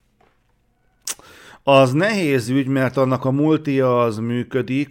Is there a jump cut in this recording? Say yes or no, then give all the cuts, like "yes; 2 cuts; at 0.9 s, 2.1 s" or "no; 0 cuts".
no; 0 cuts